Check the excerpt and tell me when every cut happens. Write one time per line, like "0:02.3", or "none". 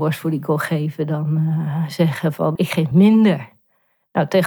0:02.6
0:02.9